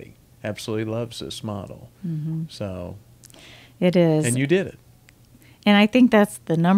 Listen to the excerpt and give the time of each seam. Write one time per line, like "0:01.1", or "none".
none